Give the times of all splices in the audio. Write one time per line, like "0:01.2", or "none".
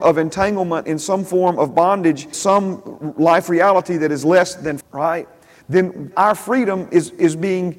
0:02.3
0:04.8
0:06.1

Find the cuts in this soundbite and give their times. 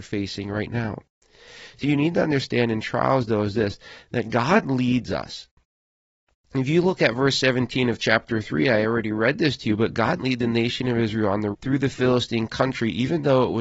0:01.8
0:10.2
0:11.5

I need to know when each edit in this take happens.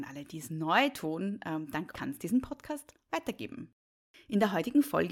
0:01.9

